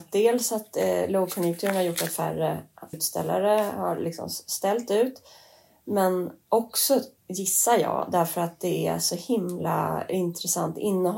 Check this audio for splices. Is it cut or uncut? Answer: cut